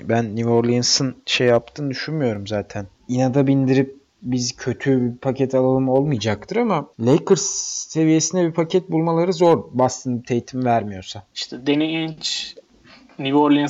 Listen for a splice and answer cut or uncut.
cut